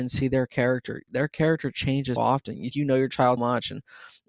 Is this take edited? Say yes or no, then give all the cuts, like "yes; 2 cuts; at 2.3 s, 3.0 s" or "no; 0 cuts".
yes; 3 cuts; at 2.2 s, 2.7 s, 3.4 s